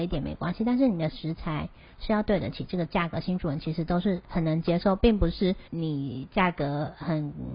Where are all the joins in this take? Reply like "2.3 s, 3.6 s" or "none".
5.7 s

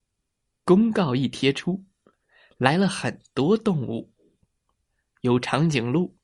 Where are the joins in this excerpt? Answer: none

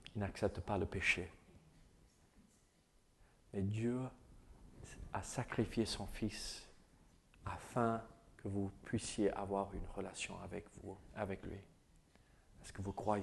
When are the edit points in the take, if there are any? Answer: 7.1 s

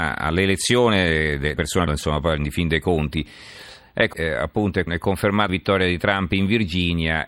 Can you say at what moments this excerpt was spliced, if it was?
1.6 s, 1.9 s, 4.1 s, 4.9 s, 5.5 s

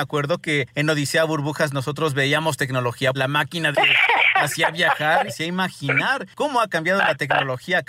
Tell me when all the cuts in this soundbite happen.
3.1 s, 3.7 s, 5.3 s

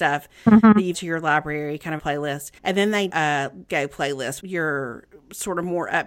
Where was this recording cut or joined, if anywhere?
0.9 s, 2.0 s, 2.6 s, 3.1 s, 3.7 s, 4.4 s

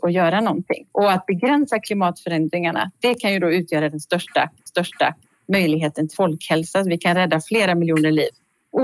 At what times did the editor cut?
4.7 s, 6.1 s

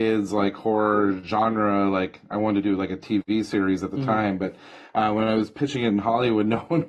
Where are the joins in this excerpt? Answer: none

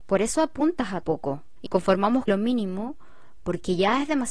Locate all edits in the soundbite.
1.0 s, 1.7 s, 2.3 s

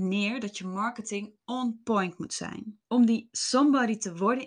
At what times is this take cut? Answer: 2.8 s

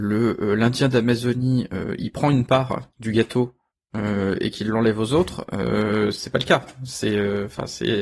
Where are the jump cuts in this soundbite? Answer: 2.9 s

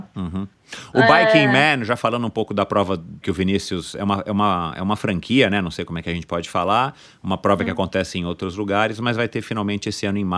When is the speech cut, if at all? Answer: 3.2 s

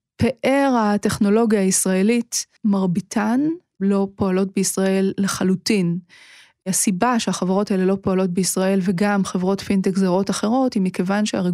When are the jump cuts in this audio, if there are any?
2.6 s

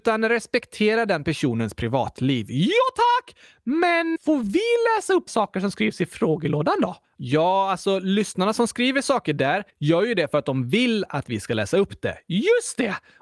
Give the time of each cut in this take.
4.2 s, 5.3 s, 7.0 s, 9.7 s

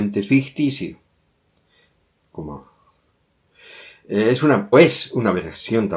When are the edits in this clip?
4.7 s

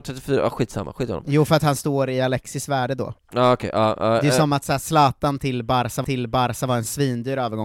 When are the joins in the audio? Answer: 6.0 s

